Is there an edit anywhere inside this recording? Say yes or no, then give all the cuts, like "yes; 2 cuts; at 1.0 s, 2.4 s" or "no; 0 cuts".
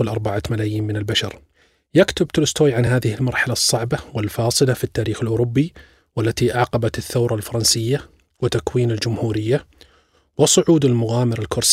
no; 0 cuts